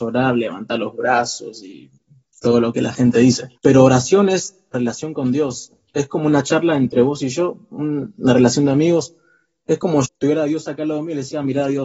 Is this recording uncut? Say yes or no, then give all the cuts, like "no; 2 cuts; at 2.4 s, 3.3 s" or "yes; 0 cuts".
no; 3 cuts; at 3.6 s, 4.7 s, 10.0 s